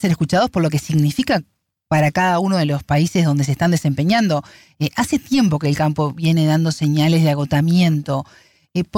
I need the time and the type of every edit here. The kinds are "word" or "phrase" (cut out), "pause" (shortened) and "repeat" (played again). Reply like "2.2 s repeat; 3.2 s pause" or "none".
none